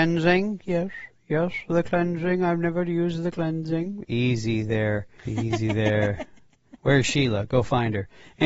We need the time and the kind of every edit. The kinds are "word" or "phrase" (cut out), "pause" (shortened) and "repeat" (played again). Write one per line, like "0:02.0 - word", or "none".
0:05.2 - pause

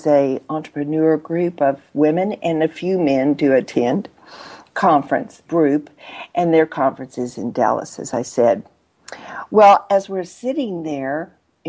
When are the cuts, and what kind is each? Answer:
0:05.5 - word

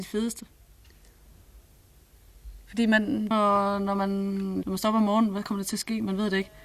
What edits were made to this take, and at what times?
0:03.3 - phrase
0:04.6 - phrase

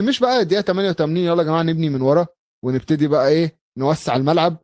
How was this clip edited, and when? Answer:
none

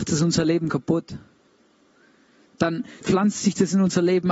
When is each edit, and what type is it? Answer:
0:03.0 - word

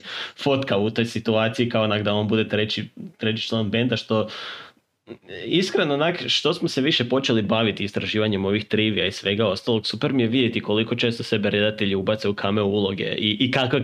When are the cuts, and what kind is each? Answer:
none

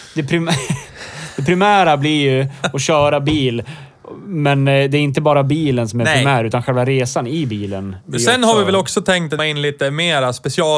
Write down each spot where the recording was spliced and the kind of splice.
0:09.4 - phrase

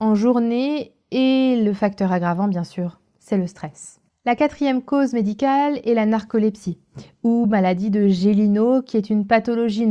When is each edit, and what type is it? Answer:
none

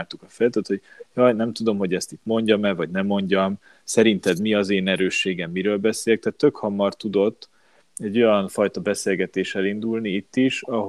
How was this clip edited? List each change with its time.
none

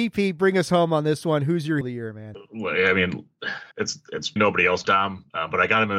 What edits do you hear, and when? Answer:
0:01.8 - word
0:03.7 - pause
0:04.4 - word
0:04.8 - word

